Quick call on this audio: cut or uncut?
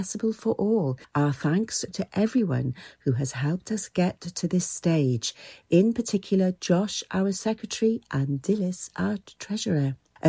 cut